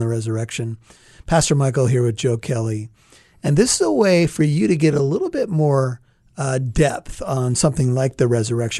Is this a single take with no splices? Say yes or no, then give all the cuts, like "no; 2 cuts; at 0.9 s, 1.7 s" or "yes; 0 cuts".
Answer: yes; 0 cuts